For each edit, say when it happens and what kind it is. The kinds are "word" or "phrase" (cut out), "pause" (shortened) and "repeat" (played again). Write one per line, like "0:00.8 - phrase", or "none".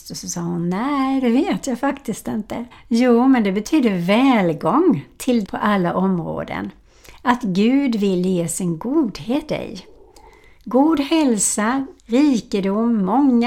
0:02.7 - pause
0:05.4 - word
0:09.5 - word
0:12.0 - pause